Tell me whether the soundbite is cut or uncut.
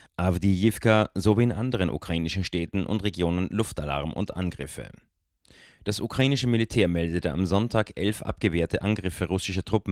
uncut